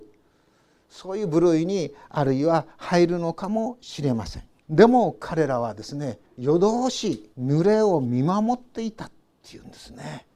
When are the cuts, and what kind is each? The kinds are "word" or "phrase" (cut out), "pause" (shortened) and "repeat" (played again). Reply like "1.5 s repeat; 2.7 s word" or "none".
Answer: 4.6 s pause; 6.3 s pause; 7.3 s pause